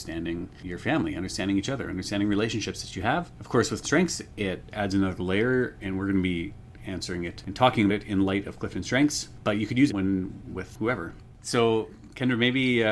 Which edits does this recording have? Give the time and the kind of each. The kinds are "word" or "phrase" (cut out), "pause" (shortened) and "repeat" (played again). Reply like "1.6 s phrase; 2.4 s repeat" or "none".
3.8 s word; 7.9 s word; 9.9 s word